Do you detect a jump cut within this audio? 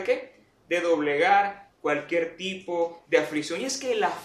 no; 0 cuts

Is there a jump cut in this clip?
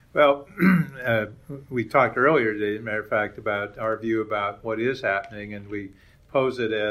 no; 0 cuts

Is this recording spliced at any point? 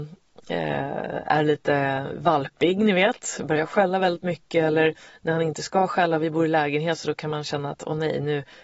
no; 0 cuts

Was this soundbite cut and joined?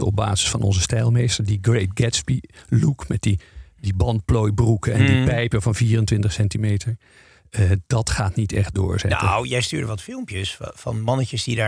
no; 0 cuts

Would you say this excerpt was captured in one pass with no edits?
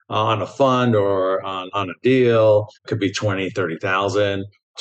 no; 1 cut; at 2.8 s

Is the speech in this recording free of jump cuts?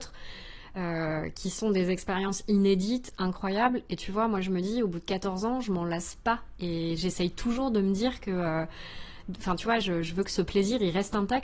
yes; 0 cuts

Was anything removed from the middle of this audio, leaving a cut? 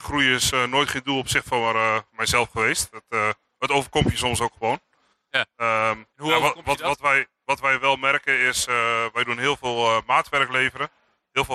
yes; 1 cut; at 6.1 s

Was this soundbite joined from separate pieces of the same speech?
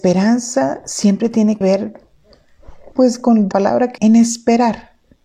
yes; 4 cuts; at 1.6 s, 2.9 s, 3.5 s, 4.0 s

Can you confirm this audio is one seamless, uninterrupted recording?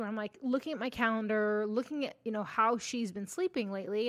yes; 0 cuts

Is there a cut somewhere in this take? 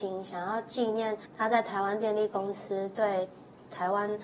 yes; 1 cut; at 1.3 s

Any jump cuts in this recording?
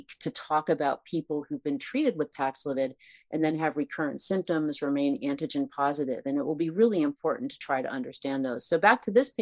no; 0 cuts

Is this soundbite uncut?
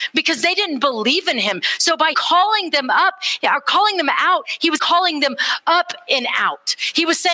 no; 2 cuts; at 2.1 s, 4.8 s

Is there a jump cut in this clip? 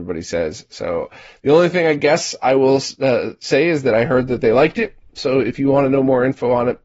no; 0 cuts

